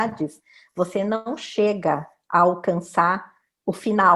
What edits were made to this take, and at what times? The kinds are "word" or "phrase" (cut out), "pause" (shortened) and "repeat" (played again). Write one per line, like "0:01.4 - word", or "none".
none

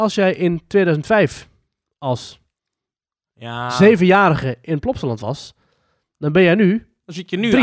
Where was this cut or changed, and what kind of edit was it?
none

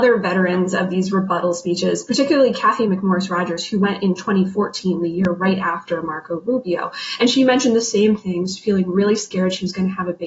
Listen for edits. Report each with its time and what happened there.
none

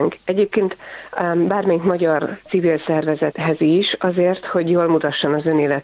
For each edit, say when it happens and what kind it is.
none

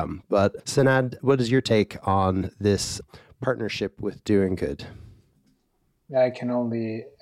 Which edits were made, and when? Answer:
none

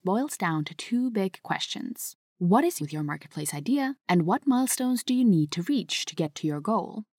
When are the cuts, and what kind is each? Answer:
0:02.3 - pause
0:02.8 - phrase
0:04.0 - pause

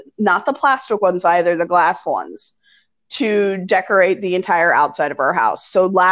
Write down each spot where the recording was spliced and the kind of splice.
none

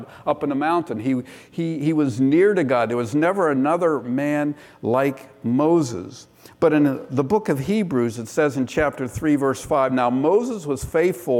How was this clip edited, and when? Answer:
none

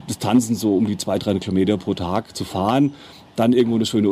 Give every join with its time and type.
none

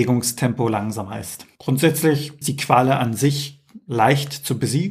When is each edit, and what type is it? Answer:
0:02.4 - word

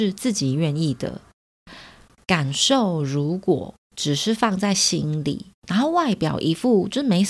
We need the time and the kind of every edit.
0:03.8 - pause
0:05.5 - pause

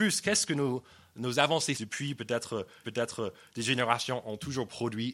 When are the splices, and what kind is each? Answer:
0:01.7 - word
0:02.8 - repeat

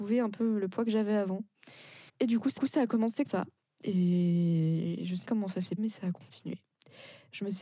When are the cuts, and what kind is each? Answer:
0:02.1 - pause
0:02.6 - repeat
0:03.2 - word
0:05.2 - word
0:05.8 - word

